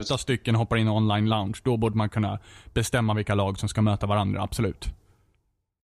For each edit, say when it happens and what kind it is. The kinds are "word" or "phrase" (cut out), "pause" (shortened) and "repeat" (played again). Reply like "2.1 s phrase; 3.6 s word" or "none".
none